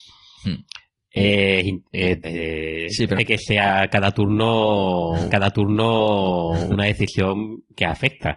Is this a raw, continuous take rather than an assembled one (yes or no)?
no